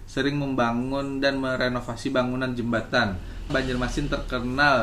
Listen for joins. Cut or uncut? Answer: cut